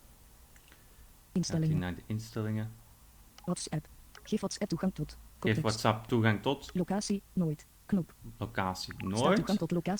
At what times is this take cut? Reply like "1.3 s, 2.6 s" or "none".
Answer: none